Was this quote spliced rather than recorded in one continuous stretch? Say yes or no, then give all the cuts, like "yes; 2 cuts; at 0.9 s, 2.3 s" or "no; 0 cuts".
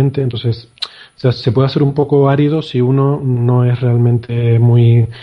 no; 0 cuts